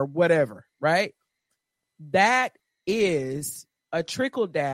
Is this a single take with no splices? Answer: yes; 0 cuts

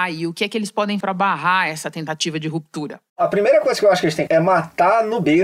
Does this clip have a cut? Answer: yes; 3 cuts; at 1.0 s, 3.1 s, 4.3 s

